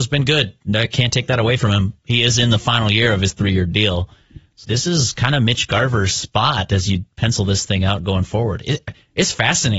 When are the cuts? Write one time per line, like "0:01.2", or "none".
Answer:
0:04.6